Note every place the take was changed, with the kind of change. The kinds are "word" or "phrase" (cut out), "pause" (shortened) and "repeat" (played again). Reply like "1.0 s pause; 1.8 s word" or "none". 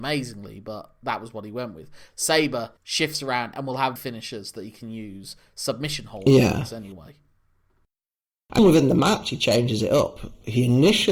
2.8 s pause; 4.0 s word; 8.6 s word